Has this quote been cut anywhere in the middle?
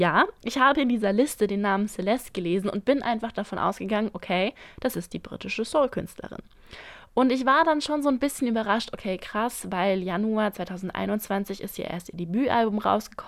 no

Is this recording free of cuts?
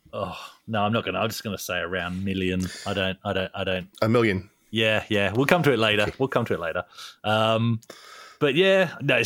no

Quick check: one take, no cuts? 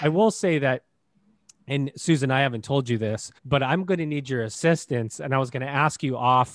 no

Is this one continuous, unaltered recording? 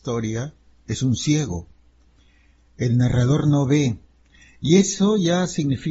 yes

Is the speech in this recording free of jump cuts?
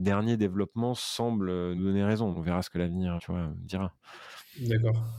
no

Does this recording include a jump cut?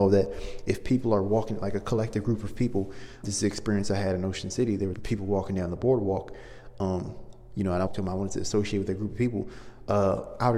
yes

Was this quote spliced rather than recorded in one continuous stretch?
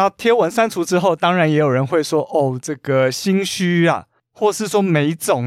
no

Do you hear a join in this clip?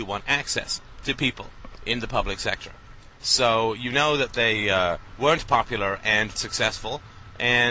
yes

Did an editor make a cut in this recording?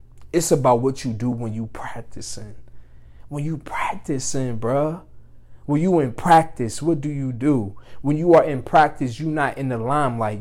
no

